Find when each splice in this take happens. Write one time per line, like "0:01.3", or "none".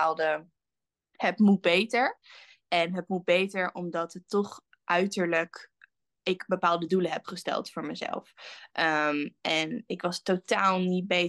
none